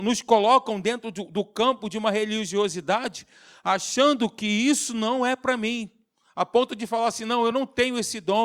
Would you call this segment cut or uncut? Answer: uncut